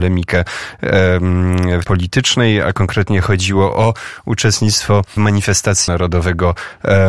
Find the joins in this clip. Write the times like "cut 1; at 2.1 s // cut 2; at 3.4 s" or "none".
cut 1; at 1.8 s // cut 2; at 5.2 s // cut 3; at 5.9 s

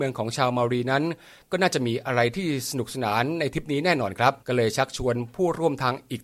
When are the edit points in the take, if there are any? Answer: cut 1; at 4.4 s

